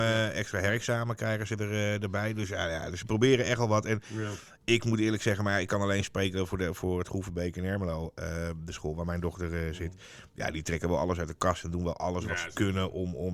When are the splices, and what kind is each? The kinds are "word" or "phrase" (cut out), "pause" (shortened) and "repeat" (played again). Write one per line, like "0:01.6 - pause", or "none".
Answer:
none